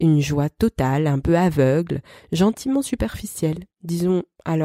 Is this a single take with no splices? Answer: yes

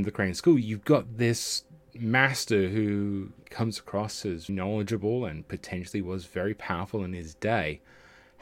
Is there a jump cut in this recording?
yes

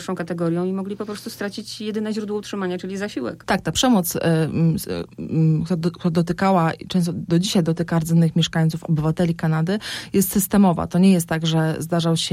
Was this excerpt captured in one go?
yes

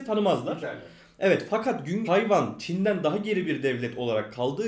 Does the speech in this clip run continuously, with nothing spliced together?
no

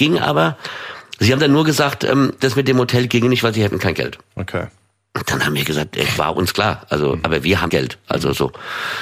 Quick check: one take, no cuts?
no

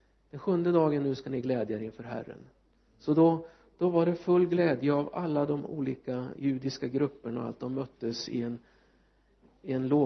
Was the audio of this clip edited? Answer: no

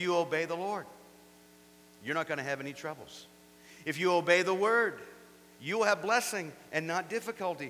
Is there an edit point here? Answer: no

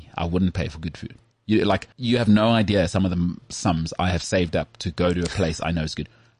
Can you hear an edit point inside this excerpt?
yes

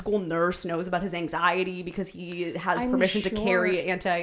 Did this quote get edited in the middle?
no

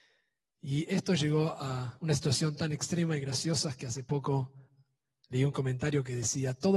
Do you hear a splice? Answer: no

